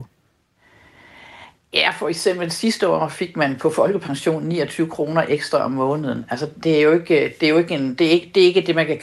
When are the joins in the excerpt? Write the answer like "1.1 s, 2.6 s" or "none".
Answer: none